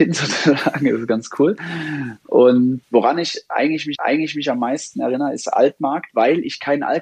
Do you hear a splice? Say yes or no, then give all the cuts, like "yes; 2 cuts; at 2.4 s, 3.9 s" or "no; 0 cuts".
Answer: yes; 2 cuts; at 2.8 s, 4.0 s